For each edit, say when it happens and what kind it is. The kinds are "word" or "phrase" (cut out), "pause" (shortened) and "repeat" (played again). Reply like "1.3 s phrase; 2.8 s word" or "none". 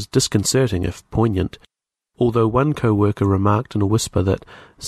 none